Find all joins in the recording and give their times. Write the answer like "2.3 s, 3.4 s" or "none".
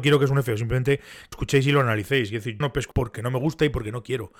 1.3 s, 2.6 s, 2.9 s